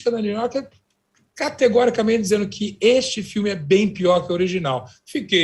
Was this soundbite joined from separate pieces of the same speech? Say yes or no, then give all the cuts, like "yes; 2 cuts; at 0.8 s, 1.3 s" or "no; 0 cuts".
no; 0 cuts